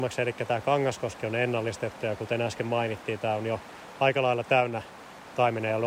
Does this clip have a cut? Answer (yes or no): no